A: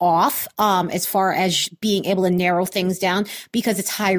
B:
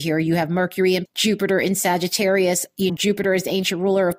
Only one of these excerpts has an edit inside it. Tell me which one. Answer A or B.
B